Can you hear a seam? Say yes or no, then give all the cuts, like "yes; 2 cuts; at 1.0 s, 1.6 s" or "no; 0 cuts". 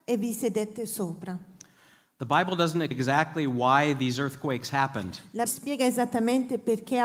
yes; 2 cuts; at 2.9 s, 5.5 s